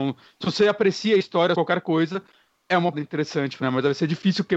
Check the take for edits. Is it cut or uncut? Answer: cut